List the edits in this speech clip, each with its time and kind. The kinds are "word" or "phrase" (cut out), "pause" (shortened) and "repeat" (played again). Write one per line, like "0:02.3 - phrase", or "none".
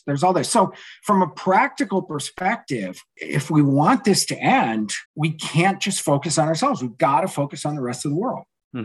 0:05.1 - pause